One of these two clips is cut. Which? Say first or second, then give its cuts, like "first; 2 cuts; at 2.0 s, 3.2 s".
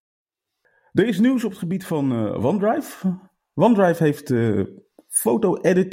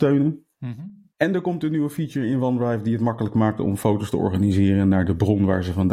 second; 1 cut; at 1.1 s